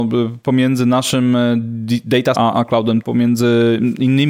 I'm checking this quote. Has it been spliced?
yes; 2 cuts; at 2.3 s, 3.0 s

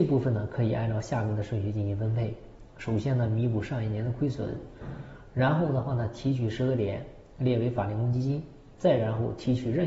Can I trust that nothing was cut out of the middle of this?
no; 1 cut; at 8.7 s

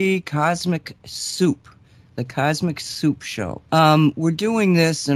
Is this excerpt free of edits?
no; 1 cut; at 3.7 s

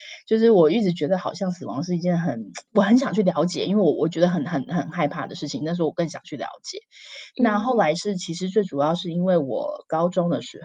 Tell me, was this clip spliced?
yes; 1 cut; at 2.7 s

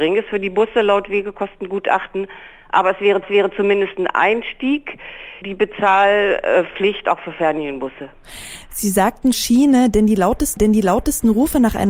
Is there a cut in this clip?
yes; 4 cuts; at 3.2 s, 5.4 s, 9.3 s, 10.6 s

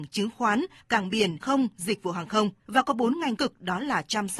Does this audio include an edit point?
yes; 3 cuts; at 1.4 s, 2.6 s, 3.4 s

